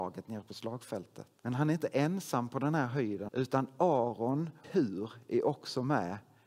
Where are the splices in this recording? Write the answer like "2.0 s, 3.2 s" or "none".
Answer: 1.4 s, 3.3 s, 4.6 s